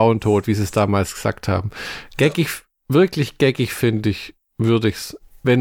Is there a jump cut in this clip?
no; 0 cuts

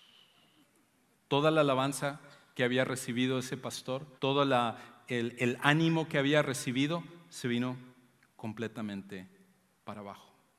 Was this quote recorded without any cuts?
no; 1 cut; at 4.2 s

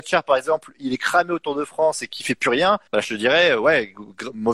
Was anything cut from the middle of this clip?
yes; 1 cut; at 2.9 s

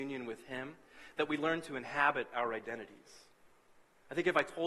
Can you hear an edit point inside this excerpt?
no; 0 cuts

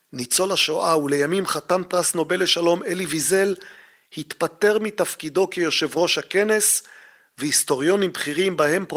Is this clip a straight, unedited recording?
yes; 0 cuts

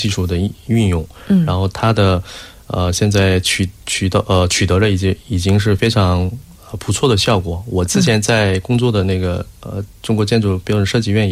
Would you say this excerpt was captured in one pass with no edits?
yes; 0 cuts

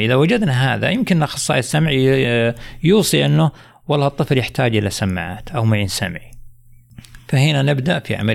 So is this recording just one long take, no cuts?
yes; 0 cuts

